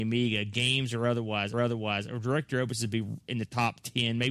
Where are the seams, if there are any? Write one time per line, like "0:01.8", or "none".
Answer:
0:01.5